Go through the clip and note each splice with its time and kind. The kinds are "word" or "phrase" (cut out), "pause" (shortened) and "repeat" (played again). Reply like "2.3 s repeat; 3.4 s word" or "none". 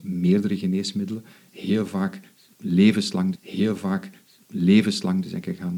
3.4 s repeat